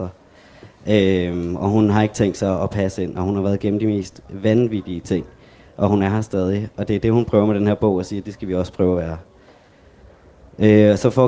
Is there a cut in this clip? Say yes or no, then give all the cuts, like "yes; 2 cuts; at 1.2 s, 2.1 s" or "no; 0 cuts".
no; 0 cuts